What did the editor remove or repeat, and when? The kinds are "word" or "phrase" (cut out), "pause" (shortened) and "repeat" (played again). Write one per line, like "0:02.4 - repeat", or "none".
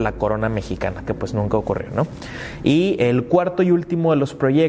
0:01.1 - word